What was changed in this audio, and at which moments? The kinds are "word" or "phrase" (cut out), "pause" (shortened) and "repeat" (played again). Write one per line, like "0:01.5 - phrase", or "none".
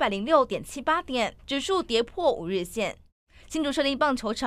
0:01.4 - pause
0:03.2 - pause